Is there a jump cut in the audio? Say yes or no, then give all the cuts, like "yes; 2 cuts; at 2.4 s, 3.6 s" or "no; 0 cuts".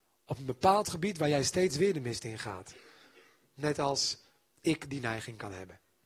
no; 0 cuts